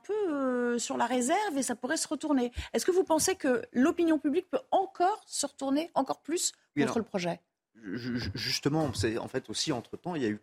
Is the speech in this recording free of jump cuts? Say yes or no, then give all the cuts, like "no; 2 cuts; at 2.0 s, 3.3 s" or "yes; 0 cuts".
yes; 0 cuts